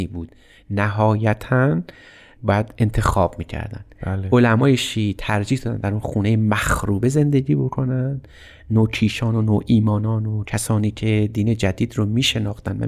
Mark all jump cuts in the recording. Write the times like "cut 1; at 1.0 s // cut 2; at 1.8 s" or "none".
none